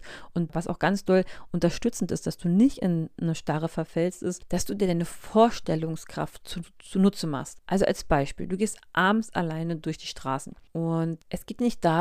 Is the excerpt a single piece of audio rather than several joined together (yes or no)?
yes